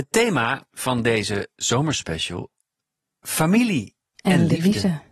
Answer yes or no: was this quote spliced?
no